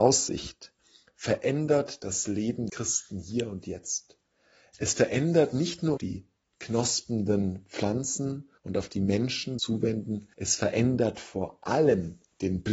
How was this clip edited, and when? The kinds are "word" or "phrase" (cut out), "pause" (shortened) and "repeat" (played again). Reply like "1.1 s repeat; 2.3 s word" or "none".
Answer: 2.7 s word; 6.0 s phrase; 8.6 s pause; 9.6 s phrase; 10.3 s pause